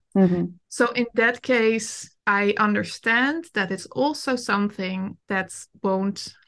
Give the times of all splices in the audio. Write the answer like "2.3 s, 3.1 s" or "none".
none